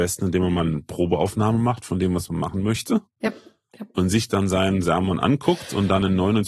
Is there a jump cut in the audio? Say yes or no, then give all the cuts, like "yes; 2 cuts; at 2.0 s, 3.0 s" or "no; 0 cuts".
no; 0 cuts